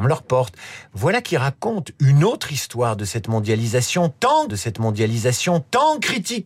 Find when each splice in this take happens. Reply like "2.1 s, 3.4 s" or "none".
4.5 s